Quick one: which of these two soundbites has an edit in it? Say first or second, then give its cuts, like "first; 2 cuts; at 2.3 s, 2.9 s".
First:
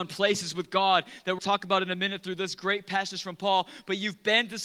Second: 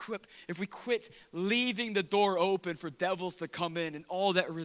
first; 1 cut; at 1.4 s